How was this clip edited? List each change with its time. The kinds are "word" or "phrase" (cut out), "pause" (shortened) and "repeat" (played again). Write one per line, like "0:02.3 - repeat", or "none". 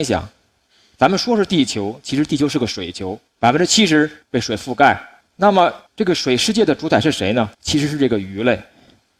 0:04.2 - pause
0:05.2 - pause
0:05.9 - pause
0:07.5 - pause

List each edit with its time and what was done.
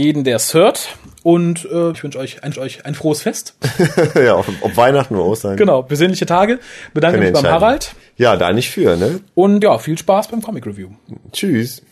0:01.9 - word
0:02.5 - repeat
0:08.0 - pause
0:09.6 - word

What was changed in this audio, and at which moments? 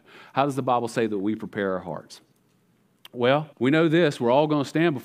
0:03.5 - pause

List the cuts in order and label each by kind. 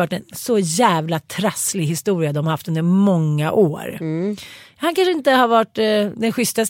none

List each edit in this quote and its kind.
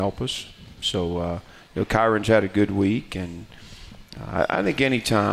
none

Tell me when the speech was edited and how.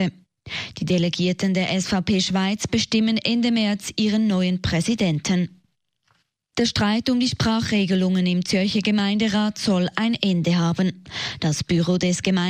none

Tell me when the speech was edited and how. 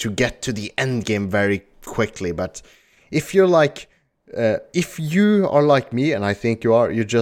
none

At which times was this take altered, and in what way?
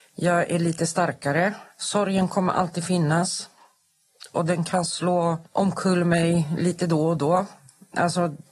0:01.7 - pause
0:05.5 - pause

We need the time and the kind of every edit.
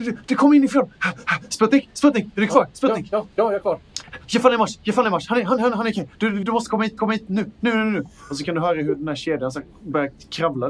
0:06.4 - word
0:07.0 - repeat

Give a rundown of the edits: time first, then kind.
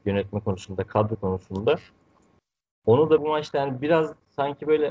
0:01.1 - word
0:03.2 - word

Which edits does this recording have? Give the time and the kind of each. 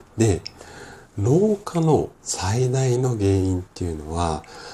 0:02.2 - pause

